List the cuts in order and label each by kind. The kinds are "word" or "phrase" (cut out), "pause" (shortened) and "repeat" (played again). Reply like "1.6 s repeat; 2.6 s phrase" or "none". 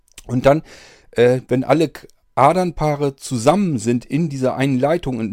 none